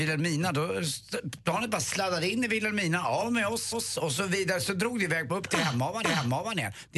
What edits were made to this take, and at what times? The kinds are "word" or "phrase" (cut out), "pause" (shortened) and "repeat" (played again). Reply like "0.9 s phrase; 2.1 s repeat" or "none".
3.7 s repeat; 5.3 s phrase; 6.0 s repeat